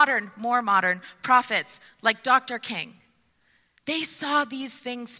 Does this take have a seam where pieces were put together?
no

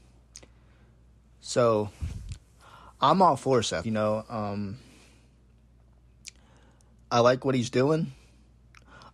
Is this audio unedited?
no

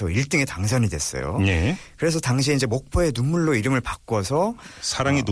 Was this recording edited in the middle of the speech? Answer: no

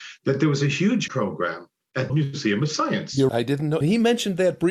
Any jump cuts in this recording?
yes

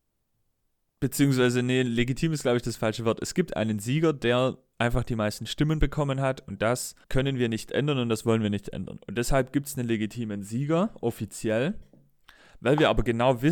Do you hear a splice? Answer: yes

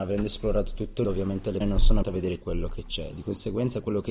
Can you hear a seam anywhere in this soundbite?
yes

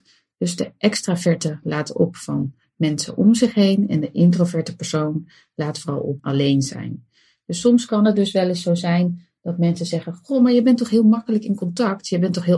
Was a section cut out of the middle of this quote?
yes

